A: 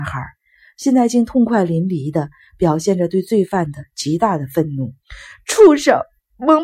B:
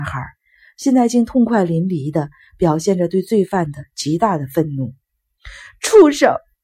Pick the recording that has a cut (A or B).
A